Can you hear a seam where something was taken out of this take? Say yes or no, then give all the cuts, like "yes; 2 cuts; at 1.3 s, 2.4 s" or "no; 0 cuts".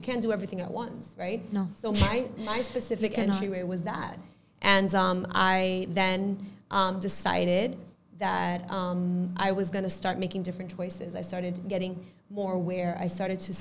no; 0 cuts